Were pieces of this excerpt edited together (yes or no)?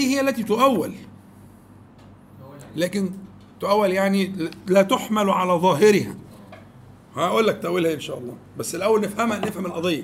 no